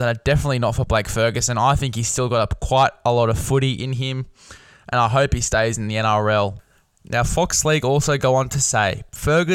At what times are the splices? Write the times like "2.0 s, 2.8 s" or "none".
none